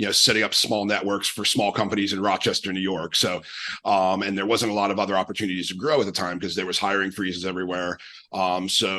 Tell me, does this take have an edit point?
no; 0 cuts

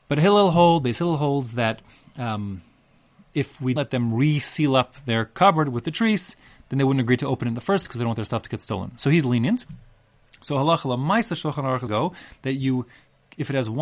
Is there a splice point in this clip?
yes; 3 cuts; at 3.8 s, 7.8 s, 11.9 s

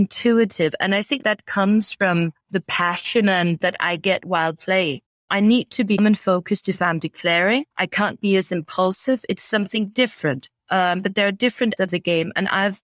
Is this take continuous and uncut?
no; 7 cuts; at 1.2 s, 2.4 s, 3.6 s, 6.0 s, 7.7 s, 10.6 s, 11.8 s

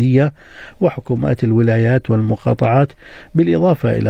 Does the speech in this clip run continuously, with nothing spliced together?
yes; 0 cuts

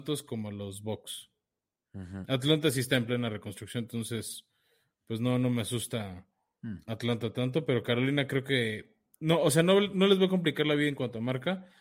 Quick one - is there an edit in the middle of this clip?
no; 0 cuts

